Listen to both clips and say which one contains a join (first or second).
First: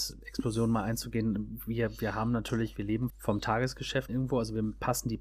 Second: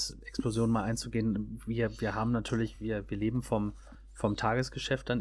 first